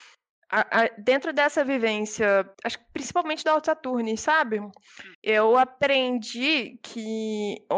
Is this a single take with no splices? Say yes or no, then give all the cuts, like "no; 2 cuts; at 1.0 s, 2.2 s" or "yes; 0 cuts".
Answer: no; 2 cuts; at 2.5 s, 5.1 s